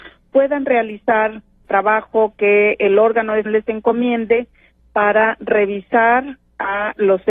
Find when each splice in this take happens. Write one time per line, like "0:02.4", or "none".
0:01.6
0:03.5